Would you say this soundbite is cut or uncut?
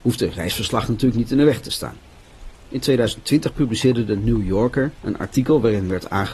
uncut